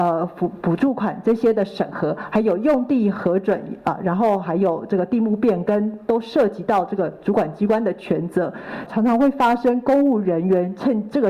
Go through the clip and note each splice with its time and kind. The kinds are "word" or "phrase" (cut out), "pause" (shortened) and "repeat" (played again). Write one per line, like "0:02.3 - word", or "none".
0:08.9 - phrase